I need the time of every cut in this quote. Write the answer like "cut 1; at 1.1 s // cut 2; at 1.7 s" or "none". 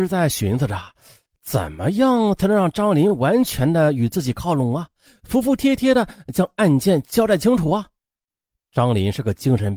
none